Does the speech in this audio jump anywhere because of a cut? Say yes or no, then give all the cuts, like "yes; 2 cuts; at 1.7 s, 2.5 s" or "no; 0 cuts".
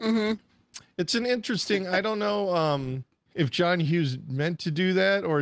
no; 0 cuts